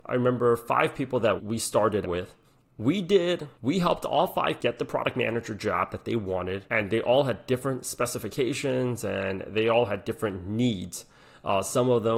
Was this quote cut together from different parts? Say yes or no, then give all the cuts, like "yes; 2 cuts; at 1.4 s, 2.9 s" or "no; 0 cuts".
yes; 6 cuts; at 1.4 s, 2.0 s, 2.4 s, 3.5 s, 4.6 s, 6.7 s